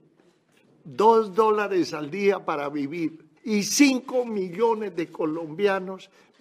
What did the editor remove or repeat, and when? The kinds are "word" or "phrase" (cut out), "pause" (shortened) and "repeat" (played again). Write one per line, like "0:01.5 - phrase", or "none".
0:03.4 - pause